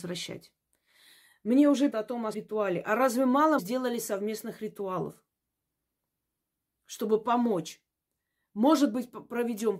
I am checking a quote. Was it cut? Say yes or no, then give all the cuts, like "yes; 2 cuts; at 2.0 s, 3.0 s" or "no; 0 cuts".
yes; 3 cuts; at 1.9 s, 2.3 s, 3.6 s